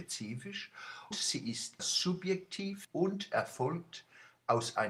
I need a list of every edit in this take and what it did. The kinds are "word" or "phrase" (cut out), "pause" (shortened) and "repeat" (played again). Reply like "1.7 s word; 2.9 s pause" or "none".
1.1 s word; 1.8 s word; 2.8 s word